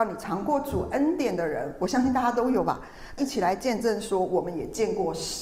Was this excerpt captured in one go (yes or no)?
no